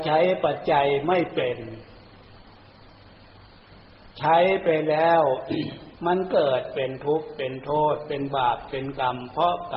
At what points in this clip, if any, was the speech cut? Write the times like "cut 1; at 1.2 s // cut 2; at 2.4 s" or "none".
cut 1; at 4.1 s // cut 2; at 6.0 s